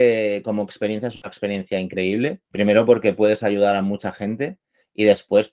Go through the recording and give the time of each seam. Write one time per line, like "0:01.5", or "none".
0:02.5